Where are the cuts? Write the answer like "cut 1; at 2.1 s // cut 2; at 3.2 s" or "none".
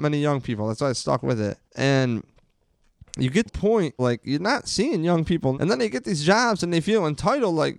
cut 1; at 1.6 s // cut 2; at 3.5 s // cut 3; at 4.0 s // cut 4; at 5.5 s